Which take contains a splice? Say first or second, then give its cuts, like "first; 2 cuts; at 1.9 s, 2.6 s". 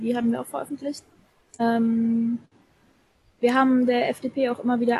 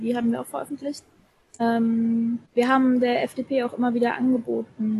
second; 1 cut; at 2.5 s